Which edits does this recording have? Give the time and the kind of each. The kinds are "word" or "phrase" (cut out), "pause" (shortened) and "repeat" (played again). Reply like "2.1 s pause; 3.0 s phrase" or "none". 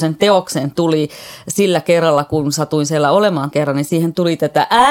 3.5 s word